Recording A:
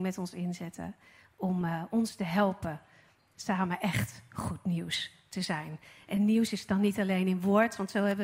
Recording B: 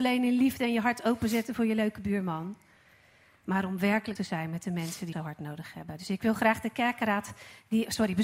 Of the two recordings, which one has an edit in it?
B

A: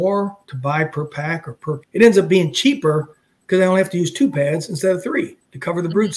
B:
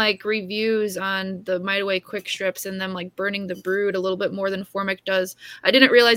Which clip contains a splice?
A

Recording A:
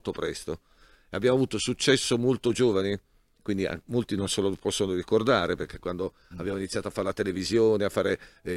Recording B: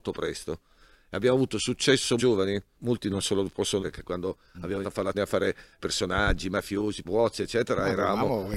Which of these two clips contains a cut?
B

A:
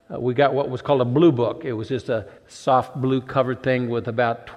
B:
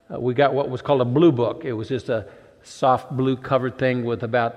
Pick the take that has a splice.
A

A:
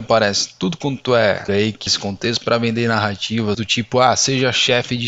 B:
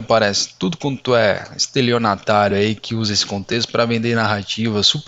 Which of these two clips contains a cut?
A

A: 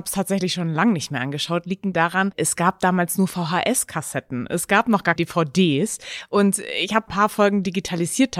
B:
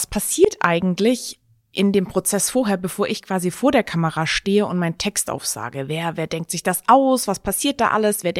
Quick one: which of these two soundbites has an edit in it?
A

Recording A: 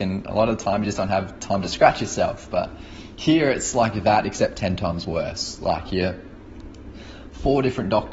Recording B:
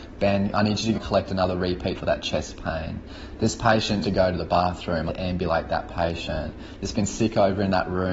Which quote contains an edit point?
B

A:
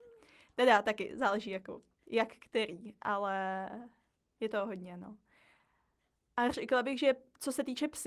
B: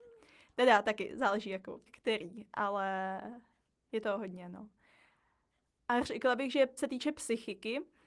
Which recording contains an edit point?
B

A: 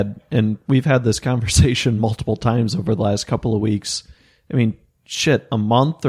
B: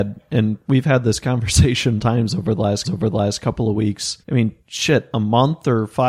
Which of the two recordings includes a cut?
B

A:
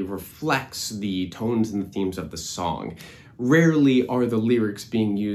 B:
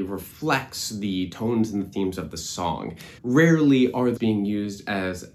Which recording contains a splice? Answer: B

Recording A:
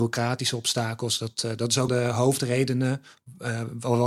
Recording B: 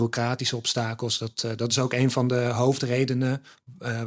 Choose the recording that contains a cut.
A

